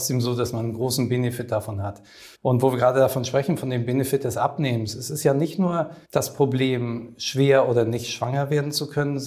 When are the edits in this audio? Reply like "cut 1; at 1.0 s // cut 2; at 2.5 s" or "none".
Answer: cut 1; at 2.3 s // cut 2; at 6.0 s